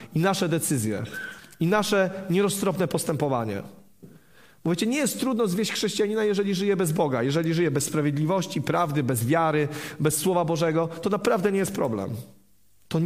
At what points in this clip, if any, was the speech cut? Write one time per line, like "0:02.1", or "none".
none